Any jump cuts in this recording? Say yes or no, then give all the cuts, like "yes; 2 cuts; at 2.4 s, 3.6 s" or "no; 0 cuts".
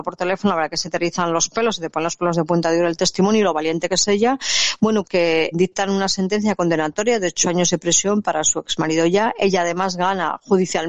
yes; 2 cuts; at 5.0 s, 5.5 s